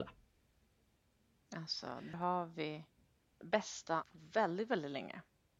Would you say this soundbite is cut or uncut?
cut